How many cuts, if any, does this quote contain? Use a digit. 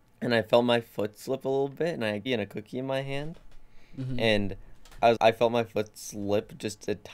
2